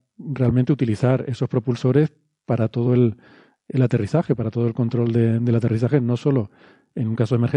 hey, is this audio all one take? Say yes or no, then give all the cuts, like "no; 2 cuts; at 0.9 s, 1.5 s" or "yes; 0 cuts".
yes; 0 cuts